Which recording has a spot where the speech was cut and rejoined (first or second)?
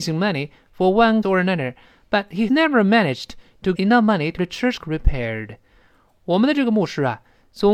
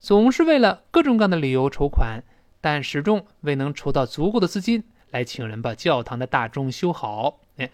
first